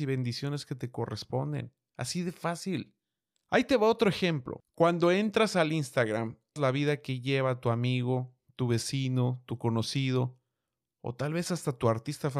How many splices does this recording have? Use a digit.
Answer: 1